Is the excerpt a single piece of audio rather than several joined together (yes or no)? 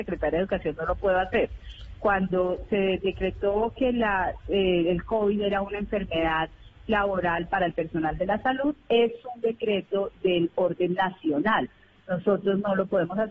yes